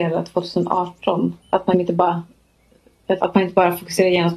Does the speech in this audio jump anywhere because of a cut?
yes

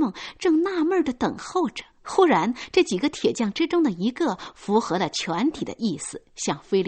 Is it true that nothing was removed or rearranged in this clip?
no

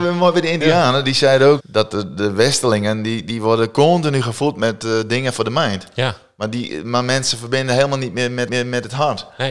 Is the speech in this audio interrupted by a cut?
yes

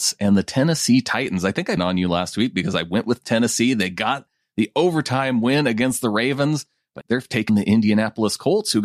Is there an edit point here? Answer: yes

